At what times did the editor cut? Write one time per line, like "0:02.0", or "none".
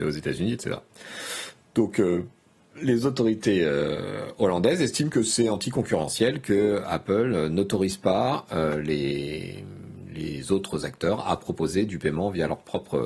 none